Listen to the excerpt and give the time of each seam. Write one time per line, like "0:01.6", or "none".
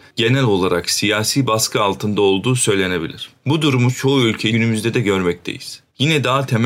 0:04.5